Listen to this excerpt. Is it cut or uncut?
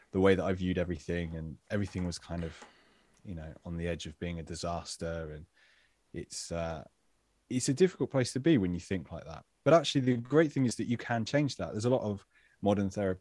uncut